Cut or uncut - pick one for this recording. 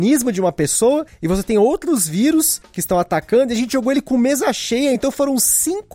uncut